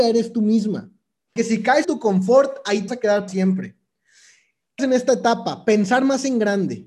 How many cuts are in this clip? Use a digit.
5